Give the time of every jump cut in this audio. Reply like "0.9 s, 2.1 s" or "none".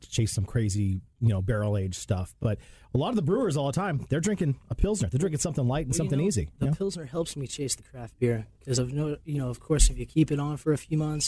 none